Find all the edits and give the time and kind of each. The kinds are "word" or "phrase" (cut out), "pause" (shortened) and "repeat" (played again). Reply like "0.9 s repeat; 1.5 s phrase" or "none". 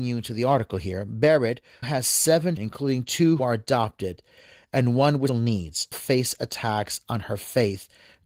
1.8 s word; 2.6 s word; 3.4 s word; 5.3 s word; 5.9 s word